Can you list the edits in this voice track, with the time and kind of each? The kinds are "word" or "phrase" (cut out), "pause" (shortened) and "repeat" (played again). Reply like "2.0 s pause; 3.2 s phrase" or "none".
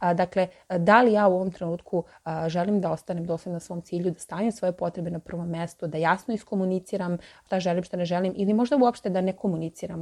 none

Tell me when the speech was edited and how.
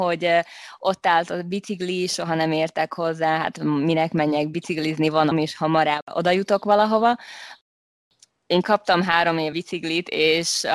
5.3 s word; 9.5 s word

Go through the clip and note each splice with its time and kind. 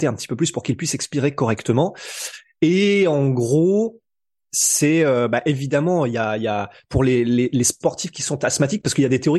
none

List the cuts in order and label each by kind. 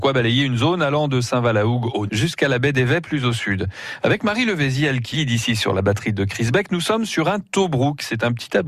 2.1 s word; 5.1 s word

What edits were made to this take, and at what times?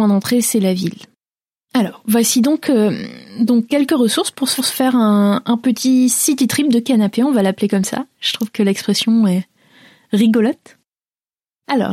4.6 s repeat

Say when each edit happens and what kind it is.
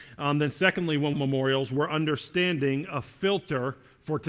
1.1 s phrase

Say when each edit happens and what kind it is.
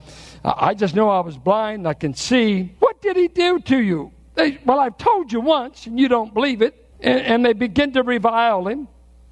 2.8 s pause; 6.9 s pause

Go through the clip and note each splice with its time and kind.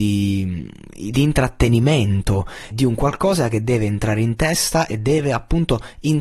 2.7 s word

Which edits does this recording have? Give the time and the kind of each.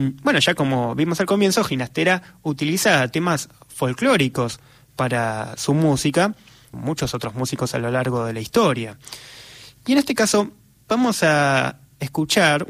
6.7 s phrase

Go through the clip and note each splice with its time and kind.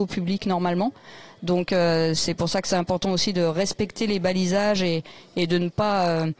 none

